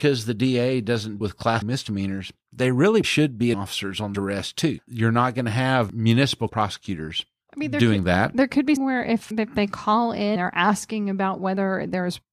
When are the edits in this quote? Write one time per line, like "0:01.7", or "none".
0:01.2
0:01.6
0:03.0
0:03.5
0:04.1
0:06.5
0:08.8
0:09.3
0:10.4